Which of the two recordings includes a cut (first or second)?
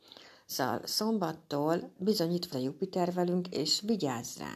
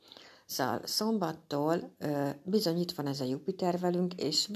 first